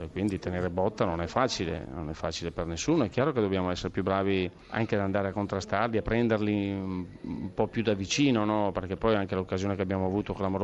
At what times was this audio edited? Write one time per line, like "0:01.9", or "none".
0:04.6